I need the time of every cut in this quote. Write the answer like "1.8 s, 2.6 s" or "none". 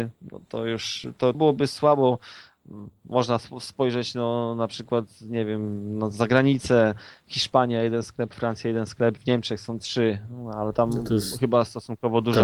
1.3 s